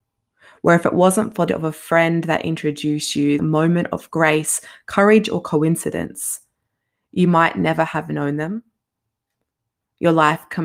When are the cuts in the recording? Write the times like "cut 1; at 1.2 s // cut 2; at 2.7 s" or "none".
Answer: cut 1; at 1.5 s // cut 2; at 3.4 s